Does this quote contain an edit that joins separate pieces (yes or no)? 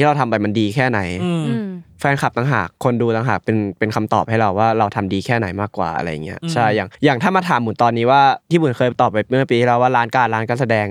yes